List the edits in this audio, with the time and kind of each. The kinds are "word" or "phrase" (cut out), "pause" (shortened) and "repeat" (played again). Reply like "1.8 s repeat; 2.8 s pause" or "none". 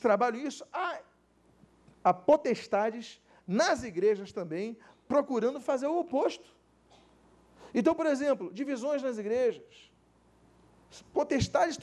none